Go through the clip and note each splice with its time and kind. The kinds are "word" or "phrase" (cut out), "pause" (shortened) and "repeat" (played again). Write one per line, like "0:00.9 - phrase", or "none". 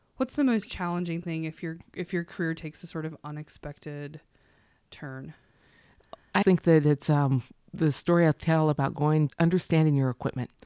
0:06.4 - word
0:09.3 - word